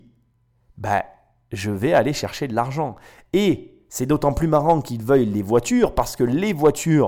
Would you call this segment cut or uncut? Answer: uncut